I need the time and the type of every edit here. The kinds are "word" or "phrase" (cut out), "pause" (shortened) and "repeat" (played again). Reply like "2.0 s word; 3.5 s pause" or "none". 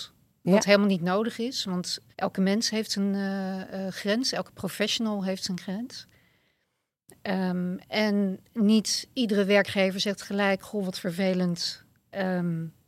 2.1 s pause